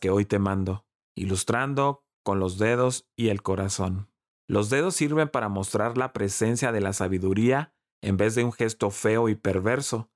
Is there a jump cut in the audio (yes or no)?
no